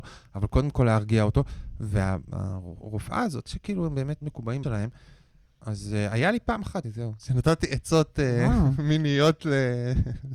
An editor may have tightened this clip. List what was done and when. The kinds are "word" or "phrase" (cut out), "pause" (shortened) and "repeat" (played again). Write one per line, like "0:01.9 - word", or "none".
0:03.5 - word
0:04.2 - word
0:04.6 - word
0:06.8 - word